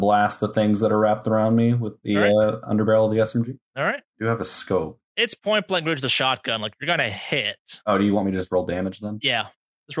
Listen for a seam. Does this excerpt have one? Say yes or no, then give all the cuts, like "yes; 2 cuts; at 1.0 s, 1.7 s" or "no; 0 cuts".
yes; 4 cuts; at 3.7 s, 4.1 s, 5.0 s, 7.8 s